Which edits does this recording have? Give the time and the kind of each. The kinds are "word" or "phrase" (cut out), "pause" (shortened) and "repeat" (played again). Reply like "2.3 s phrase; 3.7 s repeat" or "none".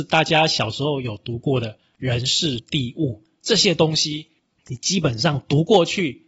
2.6 s word